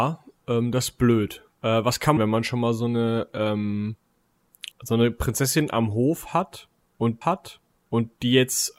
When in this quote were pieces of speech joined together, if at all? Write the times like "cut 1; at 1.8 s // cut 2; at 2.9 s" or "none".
cut 1; at 2.2 s // cut 2; at 4.7 s // cut 3; at 7.2 s